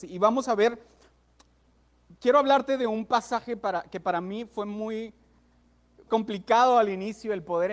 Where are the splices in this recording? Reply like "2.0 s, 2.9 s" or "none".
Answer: 6.1 s